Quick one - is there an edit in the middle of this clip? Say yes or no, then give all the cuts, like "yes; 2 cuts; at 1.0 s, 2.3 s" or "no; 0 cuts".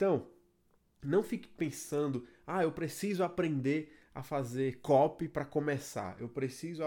no; 0 cuts